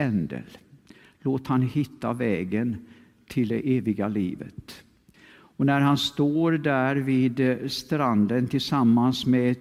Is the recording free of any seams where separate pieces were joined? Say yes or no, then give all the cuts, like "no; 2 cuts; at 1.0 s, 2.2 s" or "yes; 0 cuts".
yes; 0 cuts